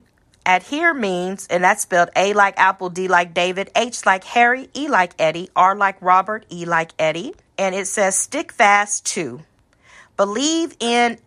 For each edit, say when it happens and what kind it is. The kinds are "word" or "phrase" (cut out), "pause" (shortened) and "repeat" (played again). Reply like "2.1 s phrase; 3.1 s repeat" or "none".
7.5 s pause